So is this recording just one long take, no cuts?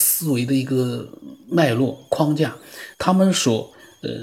no; 1 cut; at 2.9 s

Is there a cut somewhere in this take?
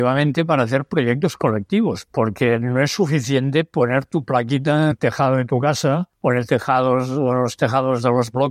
yes; 1 cut; at 4.9 s

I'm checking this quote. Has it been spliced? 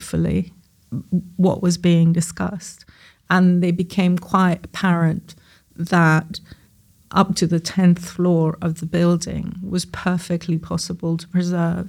no; 0 cuts

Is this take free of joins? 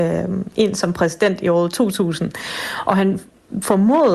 yes; 0 cuts

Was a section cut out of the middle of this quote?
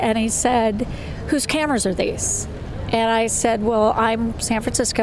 no; 0 cuts

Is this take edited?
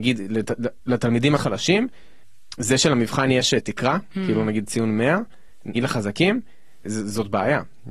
yes; 3 cuts; at 1.4 s, 5.8 s, 6.9 s

